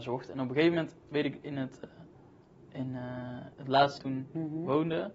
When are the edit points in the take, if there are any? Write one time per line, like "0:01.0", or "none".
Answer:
0:01.0
0:03.5
0:04.0